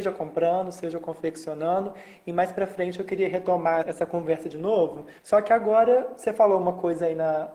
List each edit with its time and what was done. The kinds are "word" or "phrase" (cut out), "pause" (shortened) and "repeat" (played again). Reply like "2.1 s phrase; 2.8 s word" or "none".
3.8 s word; 5.2 s pause

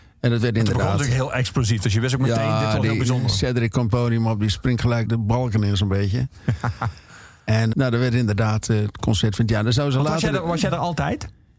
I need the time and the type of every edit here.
5.1 s word; 7.7 s word

